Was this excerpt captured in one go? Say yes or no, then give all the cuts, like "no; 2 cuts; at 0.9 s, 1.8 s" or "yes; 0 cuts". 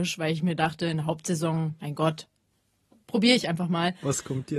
yes; 0 cuts